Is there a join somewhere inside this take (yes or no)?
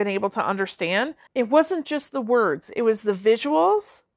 yes